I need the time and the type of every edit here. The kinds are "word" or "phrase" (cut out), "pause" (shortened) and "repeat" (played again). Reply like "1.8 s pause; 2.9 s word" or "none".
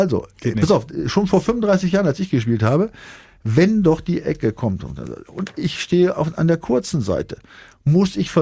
none